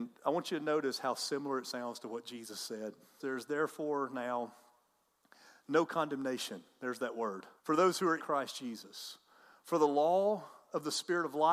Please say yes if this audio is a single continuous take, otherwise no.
no